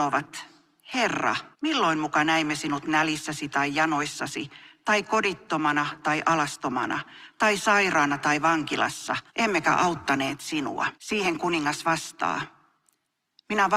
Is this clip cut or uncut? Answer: cut